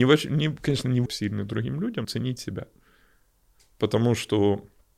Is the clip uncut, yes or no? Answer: no